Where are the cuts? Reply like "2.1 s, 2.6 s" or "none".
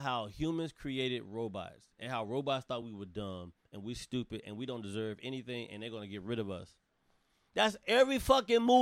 none